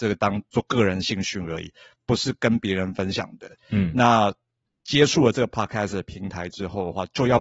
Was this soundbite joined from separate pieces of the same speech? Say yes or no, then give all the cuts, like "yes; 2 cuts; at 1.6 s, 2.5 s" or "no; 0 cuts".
no; 0 cuts